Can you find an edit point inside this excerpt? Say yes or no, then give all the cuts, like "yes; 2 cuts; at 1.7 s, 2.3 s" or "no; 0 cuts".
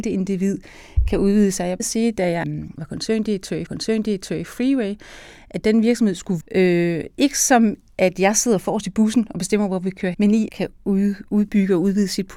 yes; 6 cuts; at 1.8 s, 2.4 s, 3.7 s, 6.4 s, 10.1 s, 10.5 s